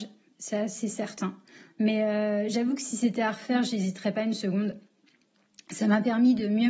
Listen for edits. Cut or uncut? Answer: uncut